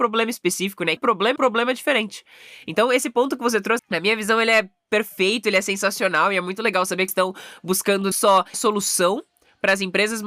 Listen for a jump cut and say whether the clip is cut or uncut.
cut